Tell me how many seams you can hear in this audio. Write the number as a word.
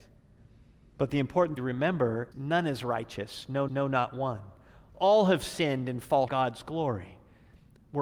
four